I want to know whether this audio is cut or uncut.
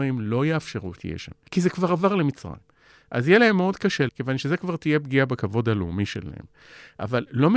cut